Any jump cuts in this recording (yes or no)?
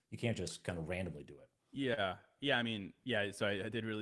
no